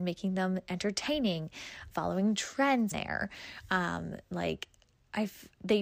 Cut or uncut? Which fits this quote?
cut